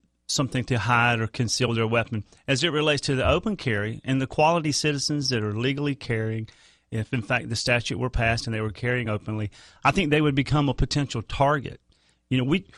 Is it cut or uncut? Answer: uncut